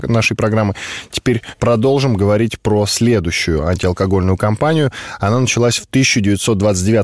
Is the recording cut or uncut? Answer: uncut